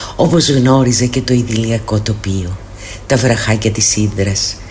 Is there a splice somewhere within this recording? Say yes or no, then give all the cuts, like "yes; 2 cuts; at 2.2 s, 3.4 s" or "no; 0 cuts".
no; 0 cuts